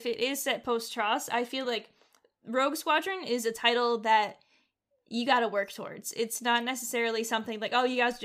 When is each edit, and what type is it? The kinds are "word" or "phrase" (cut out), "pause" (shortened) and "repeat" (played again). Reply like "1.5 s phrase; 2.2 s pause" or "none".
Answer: none